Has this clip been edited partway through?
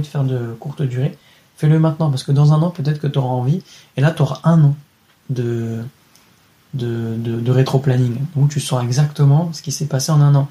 no; 0 cuts

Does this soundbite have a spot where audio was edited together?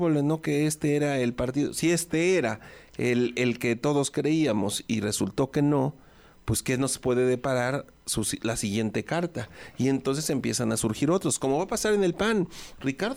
no; 0 cuts

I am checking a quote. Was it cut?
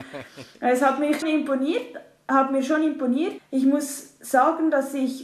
yes; 2 cuts; at 1.2 s, 3.4 s

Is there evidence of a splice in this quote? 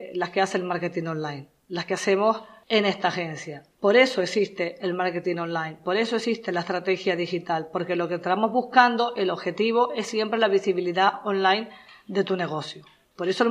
no; 0 cuts

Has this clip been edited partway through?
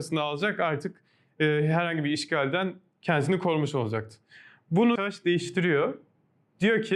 yes; 1 cut; at 5.0 s

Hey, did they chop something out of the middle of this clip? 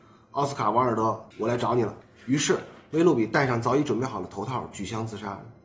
yes; 2 cuts; at 1.3 s, 2.0 s

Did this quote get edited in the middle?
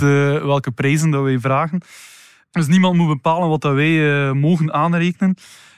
no; 0 cuts

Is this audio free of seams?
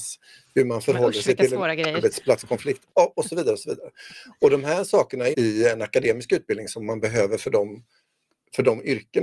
no; 1 cut; at 5.3 s

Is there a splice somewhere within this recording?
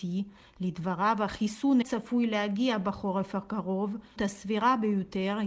yes; 2 cuts; at 1.8 s, 4.2 s

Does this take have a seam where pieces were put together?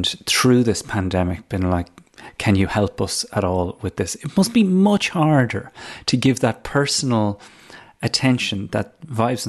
no; 0 cuts

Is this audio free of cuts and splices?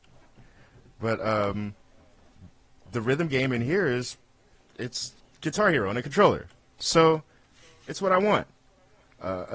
yes; 0 cuts

